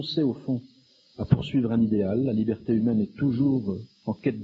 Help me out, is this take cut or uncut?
uncut